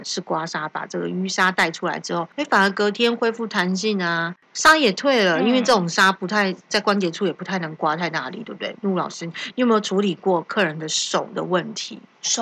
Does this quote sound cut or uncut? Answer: uncut